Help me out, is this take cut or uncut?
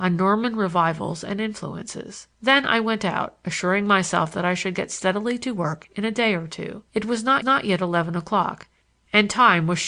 cut